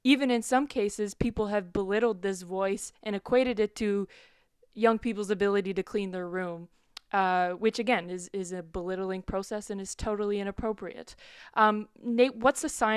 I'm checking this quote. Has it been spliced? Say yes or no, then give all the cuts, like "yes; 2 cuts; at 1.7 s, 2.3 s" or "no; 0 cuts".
no; 0 cuts